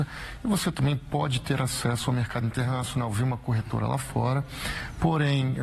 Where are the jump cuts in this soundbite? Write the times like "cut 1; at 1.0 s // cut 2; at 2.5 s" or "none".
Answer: none